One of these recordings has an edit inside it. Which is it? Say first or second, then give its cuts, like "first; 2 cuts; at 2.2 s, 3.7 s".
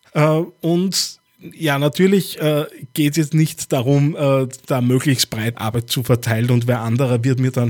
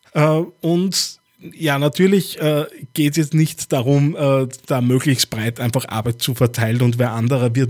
first; 1 cut; at 5.5 s